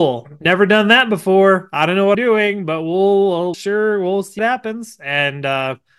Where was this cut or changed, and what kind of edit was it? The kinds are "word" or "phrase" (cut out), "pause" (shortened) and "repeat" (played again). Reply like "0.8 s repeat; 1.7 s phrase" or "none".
2.1 s word; 3.5 s word; 4.4 s word